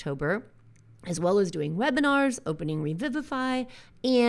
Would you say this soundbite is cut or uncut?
uncut